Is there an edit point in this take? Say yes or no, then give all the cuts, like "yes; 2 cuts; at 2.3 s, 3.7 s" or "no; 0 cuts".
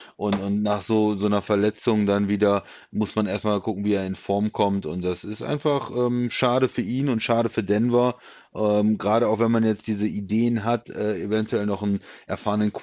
no; 0 cuts